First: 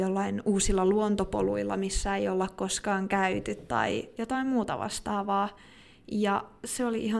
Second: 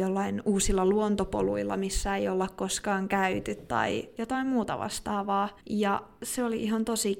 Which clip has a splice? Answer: second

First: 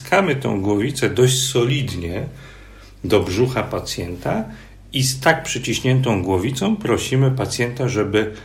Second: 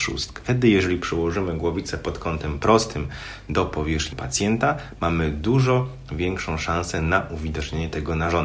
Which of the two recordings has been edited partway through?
second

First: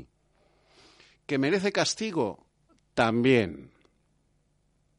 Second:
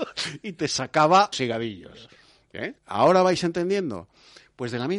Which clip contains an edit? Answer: second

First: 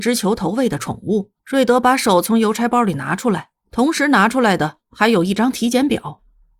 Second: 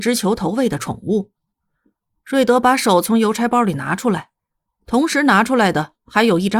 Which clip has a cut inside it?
first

